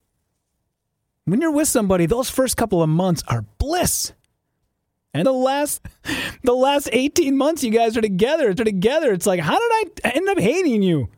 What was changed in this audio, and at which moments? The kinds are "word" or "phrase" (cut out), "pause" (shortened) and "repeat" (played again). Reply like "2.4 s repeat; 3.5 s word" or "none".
5.2 s word; 5.8 s phrase; 8.6 s repeat